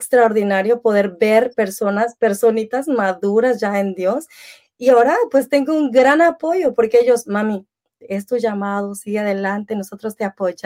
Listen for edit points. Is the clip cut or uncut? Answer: uncut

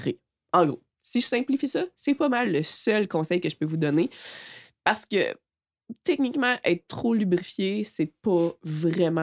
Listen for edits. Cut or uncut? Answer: uncut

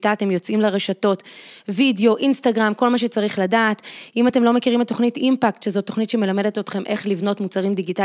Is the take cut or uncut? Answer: uncut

